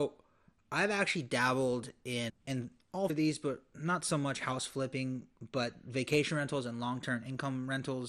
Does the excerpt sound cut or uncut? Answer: cut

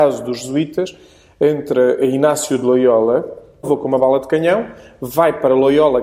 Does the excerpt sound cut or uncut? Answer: uncut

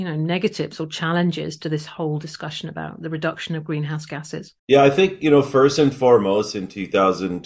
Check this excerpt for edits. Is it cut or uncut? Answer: cut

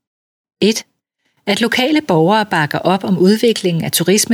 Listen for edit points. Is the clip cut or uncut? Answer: uncut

